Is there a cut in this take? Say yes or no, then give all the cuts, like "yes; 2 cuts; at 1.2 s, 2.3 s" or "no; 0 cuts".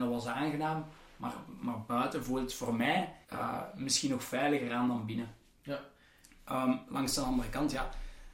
yes; 1 cut; at 3.2 s